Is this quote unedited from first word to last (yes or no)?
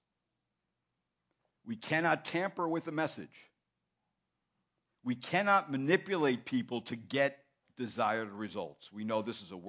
yes